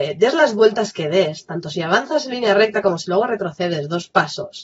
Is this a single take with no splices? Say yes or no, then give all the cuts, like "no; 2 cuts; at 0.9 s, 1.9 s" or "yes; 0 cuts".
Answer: yes; 0 cuts